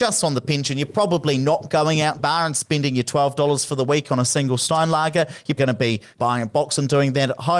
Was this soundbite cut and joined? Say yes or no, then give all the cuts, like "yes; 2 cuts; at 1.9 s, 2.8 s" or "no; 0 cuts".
yes; 2 cuts; at 2.2 s, 5.6 s